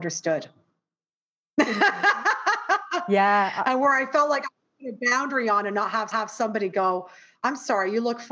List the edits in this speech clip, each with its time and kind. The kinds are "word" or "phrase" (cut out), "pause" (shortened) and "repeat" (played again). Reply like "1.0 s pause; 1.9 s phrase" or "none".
6.1 s repeat